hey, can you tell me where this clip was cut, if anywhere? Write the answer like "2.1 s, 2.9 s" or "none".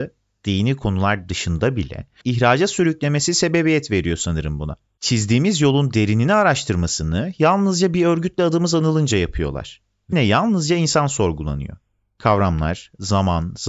2.2 s, 10.1 s